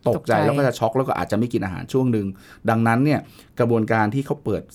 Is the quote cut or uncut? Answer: uncut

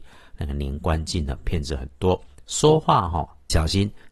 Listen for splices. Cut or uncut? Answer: uncut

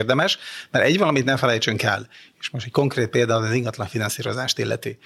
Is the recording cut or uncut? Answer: uncut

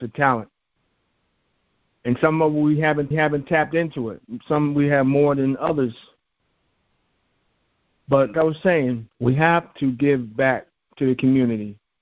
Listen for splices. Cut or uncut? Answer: cut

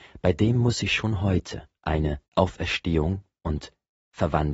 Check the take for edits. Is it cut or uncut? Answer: cut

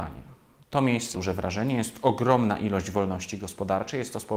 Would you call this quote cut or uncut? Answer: cut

